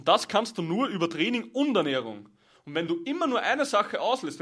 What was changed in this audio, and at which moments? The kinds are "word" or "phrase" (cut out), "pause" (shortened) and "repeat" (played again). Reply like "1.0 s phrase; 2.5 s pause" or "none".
none